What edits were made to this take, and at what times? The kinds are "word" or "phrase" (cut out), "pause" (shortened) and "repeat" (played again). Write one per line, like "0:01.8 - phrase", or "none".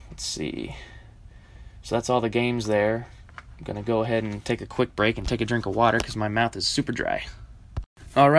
none

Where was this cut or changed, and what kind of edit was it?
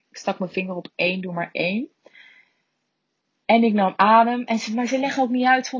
none

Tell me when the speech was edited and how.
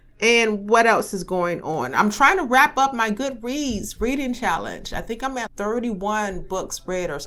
0:05.5 - word

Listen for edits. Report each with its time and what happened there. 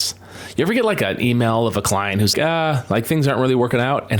0:02.3 - word

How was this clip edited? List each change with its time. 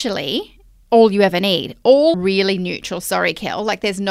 0:02.1 - phrase

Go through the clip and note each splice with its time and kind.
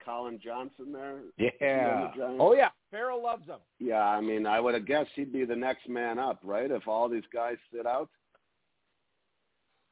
0:02.8 - pause

